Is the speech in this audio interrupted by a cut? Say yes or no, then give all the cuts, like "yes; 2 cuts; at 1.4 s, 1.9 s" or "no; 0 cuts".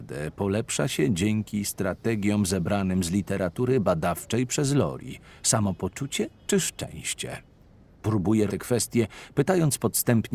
yes; 2 cuts; at 6.4 s, 8.5 s